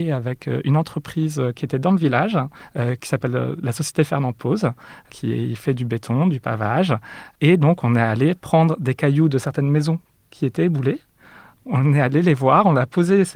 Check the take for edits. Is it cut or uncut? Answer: uncut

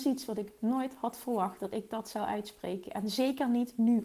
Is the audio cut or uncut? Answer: uncut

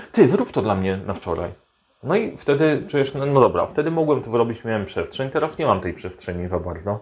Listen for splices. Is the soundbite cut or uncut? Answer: uncut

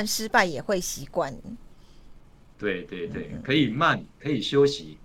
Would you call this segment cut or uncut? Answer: uncut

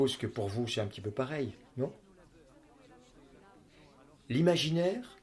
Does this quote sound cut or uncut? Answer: uncut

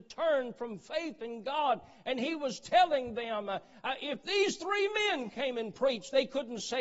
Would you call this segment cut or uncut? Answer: uncut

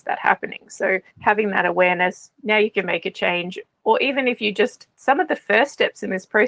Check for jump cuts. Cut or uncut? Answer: cut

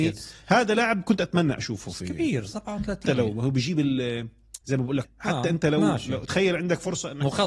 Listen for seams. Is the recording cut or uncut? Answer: cut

